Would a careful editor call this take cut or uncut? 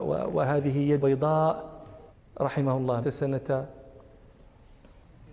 cut